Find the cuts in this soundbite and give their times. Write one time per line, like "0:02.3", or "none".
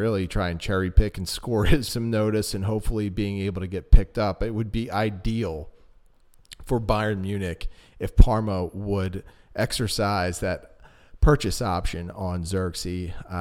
0:01.9